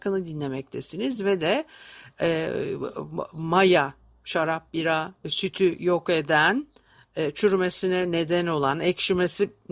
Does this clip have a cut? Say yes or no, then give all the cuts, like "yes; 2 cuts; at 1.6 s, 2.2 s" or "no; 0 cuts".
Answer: no; 0 cuts